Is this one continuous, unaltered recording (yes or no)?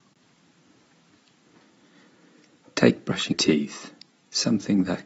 no